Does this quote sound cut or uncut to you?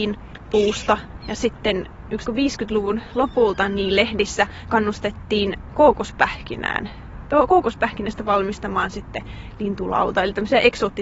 cut